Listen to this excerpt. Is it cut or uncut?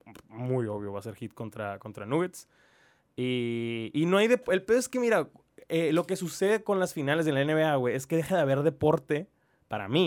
uncut